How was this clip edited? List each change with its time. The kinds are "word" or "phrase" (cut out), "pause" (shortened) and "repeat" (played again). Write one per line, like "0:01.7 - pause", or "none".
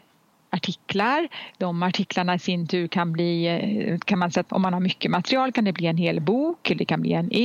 0:04.5 - word